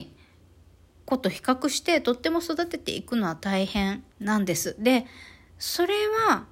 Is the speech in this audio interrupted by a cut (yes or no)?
yes